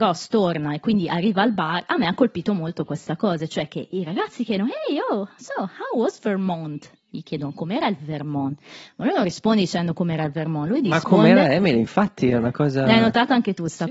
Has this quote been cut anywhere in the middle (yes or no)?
no